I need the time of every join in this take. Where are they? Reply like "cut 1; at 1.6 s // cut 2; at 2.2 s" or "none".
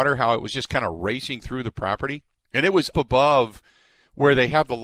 cut 1; at 2.9 s